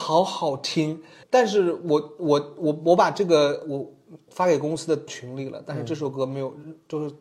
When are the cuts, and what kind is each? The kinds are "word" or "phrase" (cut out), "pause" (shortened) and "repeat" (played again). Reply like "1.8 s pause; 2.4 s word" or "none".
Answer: 1.2 s pause; 4.3 s word; 5.1 s word